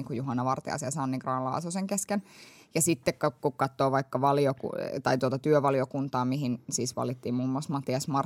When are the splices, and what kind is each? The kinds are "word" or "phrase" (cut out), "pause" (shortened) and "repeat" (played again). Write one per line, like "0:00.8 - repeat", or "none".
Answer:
none